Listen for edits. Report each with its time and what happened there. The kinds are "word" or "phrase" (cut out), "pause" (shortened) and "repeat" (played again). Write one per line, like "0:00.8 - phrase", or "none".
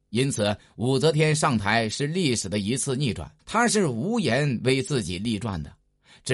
0:03.4 - pause